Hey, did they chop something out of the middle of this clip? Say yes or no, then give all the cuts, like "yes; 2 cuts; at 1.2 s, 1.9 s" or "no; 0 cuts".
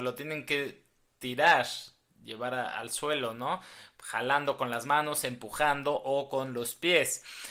no; 0 cuts